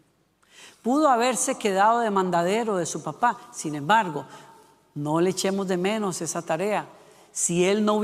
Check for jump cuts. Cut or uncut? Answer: uncut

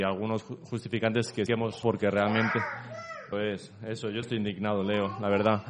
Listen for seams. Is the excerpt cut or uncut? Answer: cut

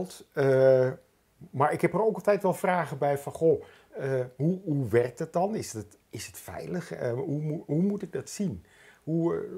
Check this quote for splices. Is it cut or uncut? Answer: uncut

